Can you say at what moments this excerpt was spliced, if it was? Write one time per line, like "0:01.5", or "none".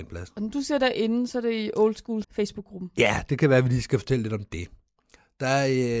0:02.2